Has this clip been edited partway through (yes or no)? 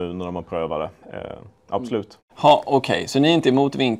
yes